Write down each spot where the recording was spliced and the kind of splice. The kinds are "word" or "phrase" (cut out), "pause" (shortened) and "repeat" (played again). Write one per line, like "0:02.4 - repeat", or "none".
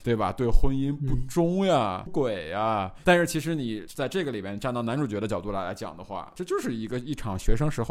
0:02.1 - word